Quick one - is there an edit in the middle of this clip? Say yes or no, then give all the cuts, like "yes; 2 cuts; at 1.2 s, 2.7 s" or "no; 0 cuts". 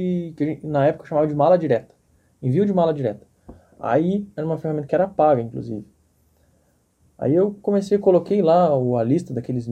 no; 0 cuts